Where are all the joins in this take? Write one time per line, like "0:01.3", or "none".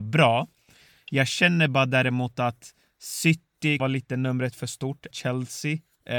0:03.8
0:05.1